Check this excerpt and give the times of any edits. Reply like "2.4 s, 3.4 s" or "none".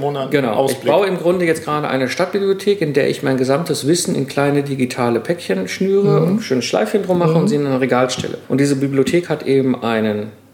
none